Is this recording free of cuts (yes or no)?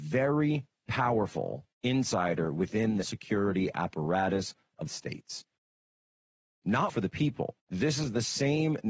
no